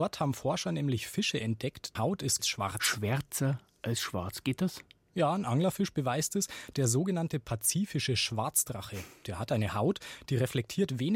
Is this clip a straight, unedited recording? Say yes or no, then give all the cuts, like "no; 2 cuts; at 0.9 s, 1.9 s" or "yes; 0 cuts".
no; 2 cuts; at 2.0 s, 2.4 s